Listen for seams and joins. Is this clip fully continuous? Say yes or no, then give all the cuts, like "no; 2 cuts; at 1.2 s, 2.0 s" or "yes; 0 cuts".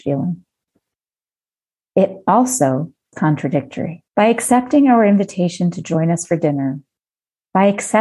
no; 2 cuts; at 3.1 s, 4.1 s